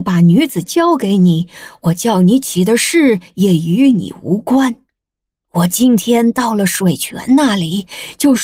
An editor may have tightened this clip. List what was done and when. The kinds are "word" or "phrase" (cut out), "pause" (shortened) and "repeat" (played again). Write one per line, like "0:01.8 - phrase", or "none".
none